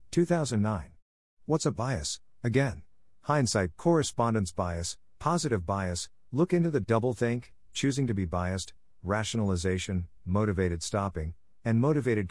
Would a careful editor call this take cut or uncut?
cut